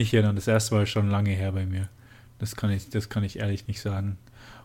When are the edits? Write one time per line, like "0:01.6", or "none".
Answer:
none